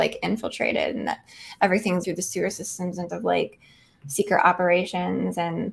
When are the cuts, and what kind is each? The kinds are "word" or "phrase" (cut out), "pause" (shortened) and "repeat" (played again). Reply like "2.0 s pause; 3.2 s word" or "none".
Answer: 2.0 s word; 3.1 s word